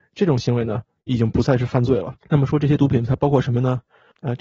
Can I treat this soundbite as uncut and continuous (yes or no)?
no